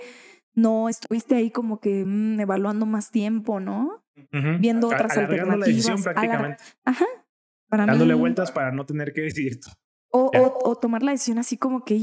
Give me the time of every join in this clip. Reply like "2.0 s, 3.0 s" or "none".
none

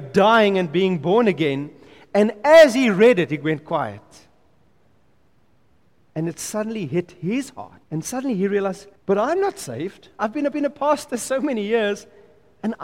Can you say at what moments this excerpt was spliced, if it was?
7.8 s, 9.0 s, 10.5 s

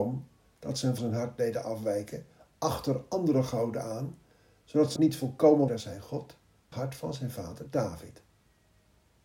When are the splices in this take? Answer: 1.0 s, 5.0 s, 5.7 s, 6.7 s

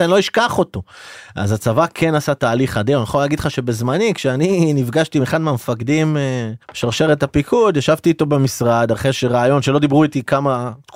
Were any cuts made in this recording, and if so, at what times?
6.6 s

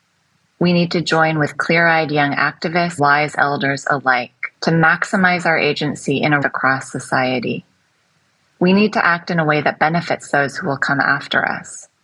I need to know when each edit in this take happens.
3.0 s, 4.5 s, 6.4 s

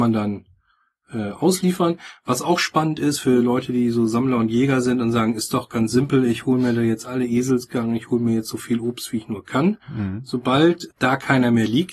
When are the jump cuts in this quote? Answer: 9.8 s

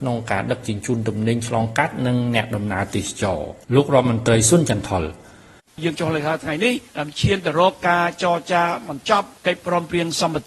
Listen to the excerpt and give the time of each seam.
3.6 s, 6.9 s, 9.4 s

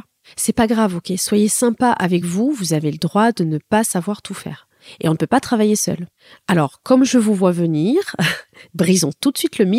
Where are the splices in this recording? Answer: none

